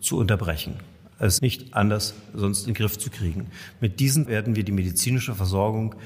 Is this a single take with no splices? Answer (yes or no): no